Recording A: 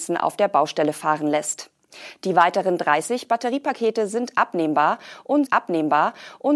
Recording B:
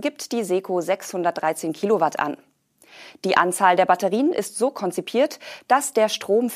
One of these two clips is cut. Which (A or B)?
A